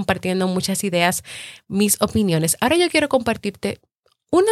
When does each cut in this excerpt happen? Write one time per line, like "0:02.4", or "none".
none